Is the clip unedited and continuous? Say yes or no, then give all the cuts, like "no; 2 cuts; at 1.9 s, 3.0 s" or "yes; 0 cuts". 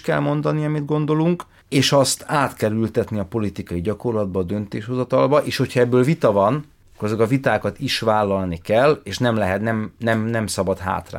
yes; 0 cuts